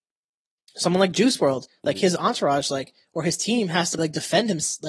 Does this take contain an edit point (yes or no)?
yes